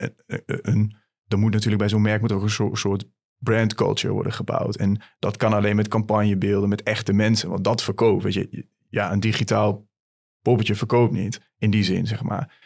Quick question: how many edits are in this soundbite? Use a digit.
0